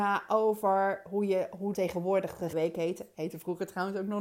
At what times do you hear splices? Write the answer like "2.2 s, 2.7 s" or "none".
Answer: 1.7 s, 2.5 s